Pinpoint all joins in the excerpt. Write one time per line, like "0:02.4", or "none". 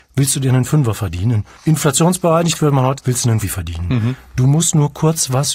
0:01.5
0:03.0
0:03.4